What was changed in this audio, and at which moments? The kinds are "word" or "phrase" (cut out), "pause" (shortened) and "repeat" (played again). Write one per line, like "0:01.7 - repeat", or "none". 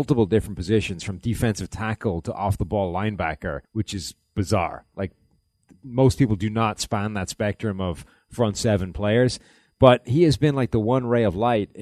0:03.6 - pause